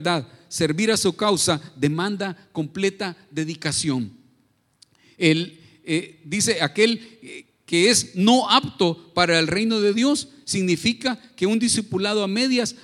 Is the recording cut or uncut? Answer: uncut